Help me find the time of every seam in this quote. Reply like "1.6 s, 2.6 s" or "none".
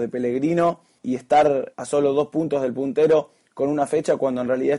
1.0 s, 1.7 s